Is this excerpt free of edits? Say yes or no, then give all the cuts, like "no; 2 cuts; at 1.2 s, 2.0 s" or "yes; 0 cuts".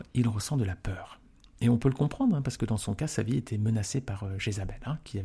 yes; 0 cuts